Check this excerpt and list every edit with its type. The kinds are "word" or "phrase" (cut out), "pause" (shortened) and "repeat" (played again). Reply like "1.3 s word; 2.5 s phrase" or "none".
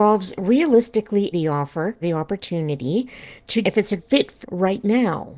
1.3 s word; 2.0 s word; 3.6 s word; 4.0 s word; 4.4 s word